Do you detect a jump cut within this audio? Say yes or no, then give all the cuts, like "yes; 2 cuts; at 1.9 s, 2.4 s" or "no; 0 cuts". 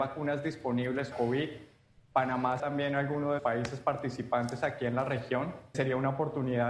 yes; 4 cuts; at 1.1 s, 2.6 s, 3.4 s, 5.7 s